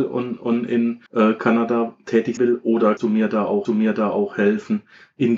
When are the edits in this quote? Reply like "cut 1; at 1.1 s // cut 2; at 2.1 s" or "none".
cut 1; at 1.1 s // cut 2; at 2.4 s // cut 3; at 3.0 s // cut 4; at 3.6 s